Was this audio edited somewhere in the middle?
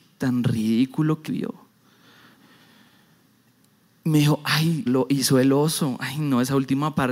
yes; 2 cuts; at 1.3 s, 4.9 s

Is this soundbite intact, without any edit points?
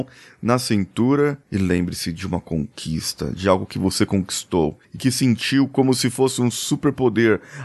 no; 1 cut; at 4.8 s

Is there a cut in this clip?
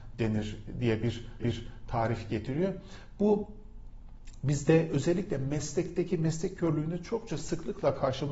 yes; 1 cut; at 1.4 s

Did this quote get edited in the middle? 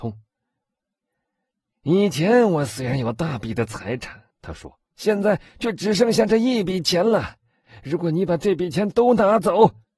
yes; 2 cuts; at 4.3 s, 4.9 s

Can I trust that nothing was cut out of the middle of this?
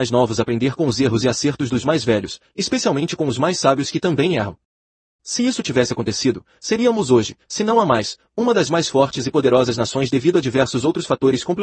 yes; 0 cuts

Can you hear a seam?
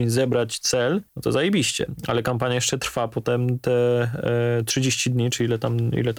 yes; 1 cut; at 1.1 s

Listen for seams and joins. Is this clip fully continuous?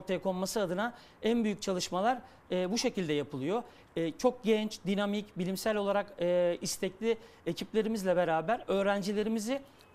yes; 0 cuts

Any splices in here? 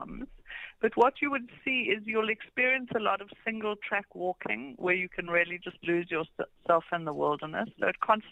no; 0 cuts

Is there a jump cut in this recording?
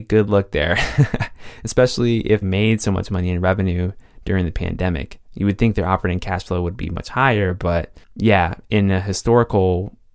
yes; 2 cuts; at 2.4 s, 8.0 s

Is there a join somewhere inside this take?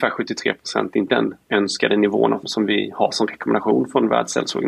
yes; 3 cuts; at 1.1 s, 1.4 s, 2.4 s

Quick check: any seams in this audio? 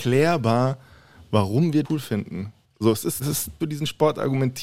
yes; 4 cuts; at 1.8 s, 2.6 s, 3.2 s, 3.6 s

